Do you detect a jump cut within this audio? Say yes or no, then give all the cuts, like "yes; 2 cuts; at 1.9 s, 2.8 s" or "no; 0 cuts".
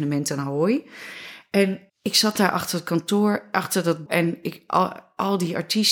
yes; 2 cuts; at 1.9 s, 4.1 s